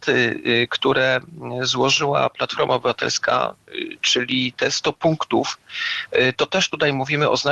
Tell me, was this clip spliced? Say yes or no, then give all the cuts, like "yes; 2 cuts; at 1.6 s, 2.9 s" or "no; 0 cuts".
no; 0 cuts